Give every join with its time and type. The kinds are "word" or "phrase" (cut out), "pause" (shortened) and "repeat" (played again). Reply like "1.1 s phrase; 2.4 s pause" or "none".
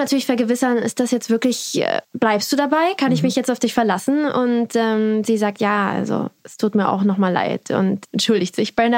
2.0 s pause; 6.4 s pause